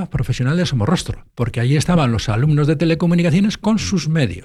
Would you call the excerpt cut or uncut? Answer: uncut